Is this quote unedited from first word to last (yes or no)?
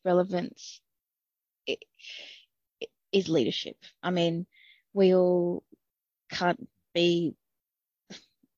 yes